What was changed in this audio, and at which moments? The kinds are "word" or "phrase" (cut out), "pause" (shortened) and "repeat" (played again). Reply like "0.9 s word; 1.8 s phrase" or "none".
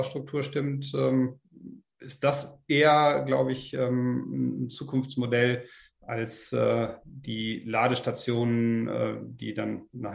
none